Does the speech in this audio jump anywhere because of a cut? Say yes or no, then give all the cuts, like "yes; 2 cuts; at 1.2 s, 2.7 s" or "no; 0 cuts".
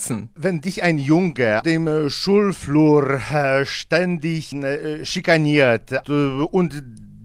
yes; 2 cuts; at 1.6 s, 6.0 s